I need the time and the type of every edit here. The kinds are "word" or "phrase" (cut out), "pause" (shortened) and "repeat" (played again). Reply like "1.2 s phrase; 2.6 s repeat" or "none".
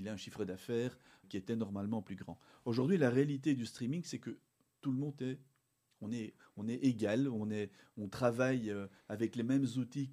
1.2 s word